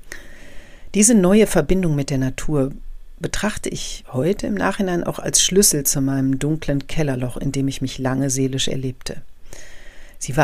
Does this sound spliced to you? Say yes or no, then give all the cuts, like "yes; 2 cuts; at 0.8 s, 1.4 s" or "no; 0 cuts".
no; 0 cuts